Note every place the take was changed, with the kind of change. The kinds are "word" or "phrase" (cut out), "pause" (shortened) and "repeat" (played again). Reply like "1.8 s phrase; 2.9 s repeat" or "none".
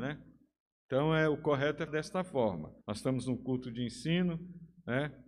1.9 s word; 2.8 s pause